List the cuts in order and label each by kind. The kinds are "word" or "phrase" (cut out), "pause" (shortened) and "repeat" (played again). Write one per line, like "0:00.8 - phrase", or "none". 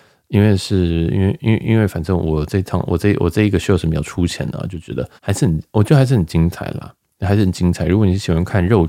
0:05.2 - pause